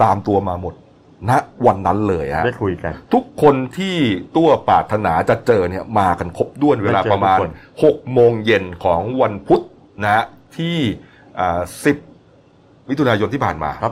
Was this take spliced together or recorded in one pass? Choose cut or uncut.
uncut